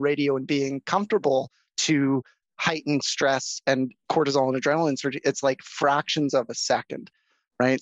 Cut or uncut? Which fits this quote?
uncut